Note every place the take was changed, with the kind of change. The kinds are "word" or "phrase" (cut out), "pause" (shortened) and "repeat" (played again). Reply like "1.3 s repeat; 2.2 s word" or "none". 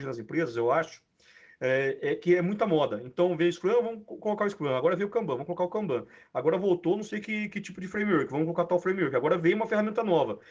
none